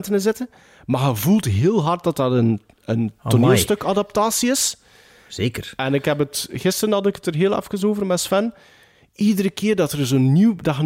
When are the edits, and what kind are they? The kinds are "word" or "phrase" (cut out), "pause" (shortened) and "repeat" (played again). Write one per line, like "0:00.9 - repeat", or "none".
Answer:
none